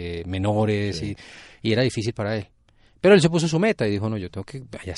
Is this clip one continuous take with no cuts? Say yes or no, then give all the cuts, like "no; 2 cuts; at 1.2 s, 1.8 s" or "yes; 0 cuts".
yes; 0 cuts